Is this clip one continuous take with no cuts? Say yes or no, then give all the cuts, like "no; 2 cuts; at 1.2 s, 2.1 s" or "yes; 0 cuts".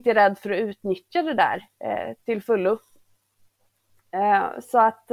yes; 0 cuts